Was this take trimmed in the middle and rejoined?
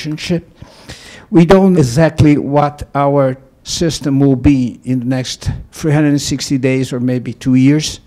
yes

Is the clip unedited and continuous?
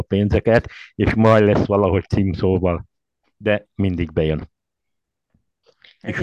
yes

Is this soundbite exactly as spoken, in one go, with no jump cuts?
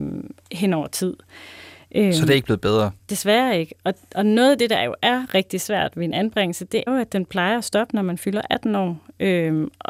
no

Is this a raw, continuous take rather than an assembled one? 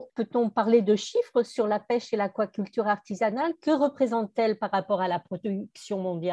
yes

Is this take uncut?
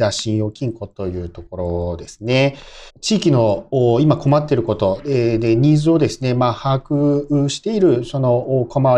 no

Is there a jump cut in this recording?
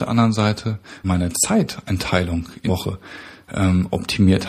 yes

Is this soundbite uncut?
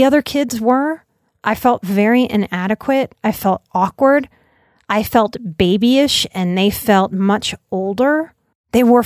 yes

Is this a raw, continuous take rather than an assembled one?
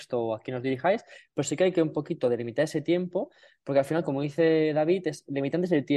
yes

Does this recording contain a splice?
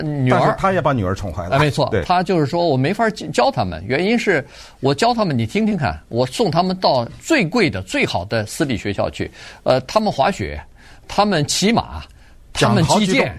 no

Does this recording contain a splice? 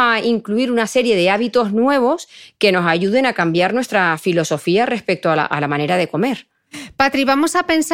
no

